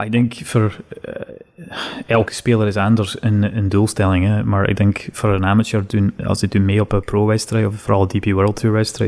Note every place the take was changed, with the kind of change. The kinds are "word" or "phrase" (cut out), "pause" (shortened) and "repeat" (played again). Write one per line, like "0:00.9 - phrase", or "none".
none